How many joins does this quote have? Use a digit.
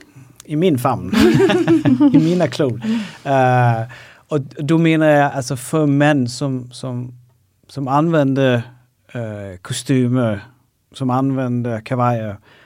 0